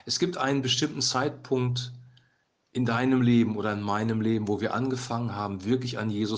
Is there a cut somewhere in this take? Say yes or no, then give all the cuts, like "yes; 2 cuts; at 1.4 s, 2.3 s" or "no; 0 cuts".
no; 0 cuts